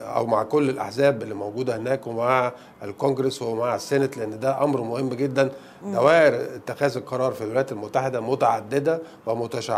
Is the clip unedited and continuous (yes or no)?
yes